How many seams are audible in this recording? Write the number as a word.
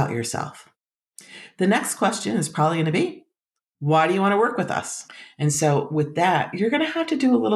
zero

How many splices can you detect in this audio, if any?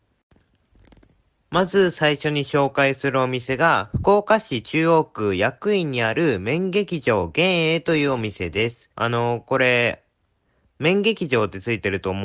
one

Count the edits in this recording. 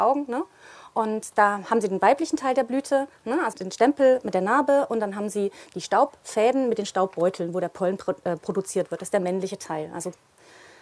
one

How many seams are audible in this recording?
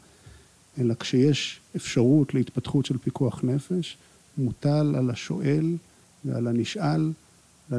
zero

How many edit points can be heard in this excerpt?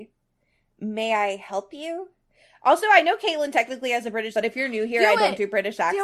one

